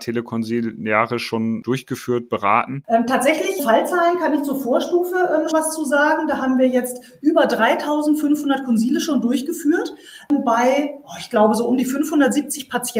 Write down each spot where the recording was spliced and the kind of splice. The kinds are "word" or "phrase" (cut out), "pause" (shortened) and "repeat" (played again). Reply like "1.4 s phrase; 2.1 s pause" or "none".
3.6 s word; 5.5 s word